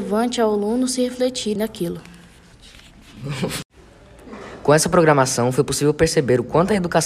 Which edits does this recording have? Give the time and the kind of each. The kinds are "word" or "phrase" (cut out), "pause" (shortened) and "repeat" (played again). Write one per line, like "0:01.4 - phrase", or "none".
0:01.6 - phrase